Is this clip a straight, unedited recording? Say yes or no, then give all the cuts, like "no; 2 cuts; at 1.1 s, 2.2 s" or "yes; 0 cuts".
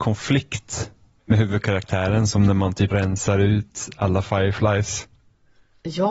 no; 1 cut; at 2.9 s